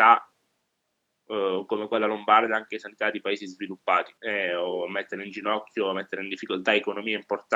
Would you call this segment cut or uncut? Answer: cut